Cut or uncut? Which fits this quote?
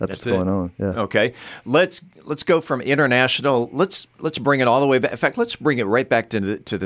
uncut